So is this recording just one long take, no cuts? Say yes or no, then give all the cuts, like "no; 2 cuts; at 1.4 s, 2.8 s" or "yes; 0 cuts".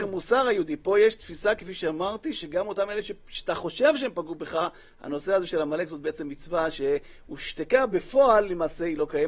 yes; 0 cuts